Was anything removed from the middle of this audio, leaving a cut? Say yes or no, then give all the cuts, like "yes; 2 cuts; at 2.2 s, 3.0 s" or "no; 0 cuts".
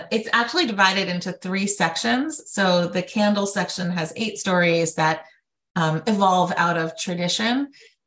no; 0 cuts